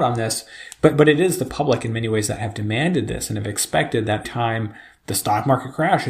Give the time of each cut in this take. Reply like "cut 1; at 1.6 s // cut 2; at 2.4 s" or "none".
cut 1; at 4.2 s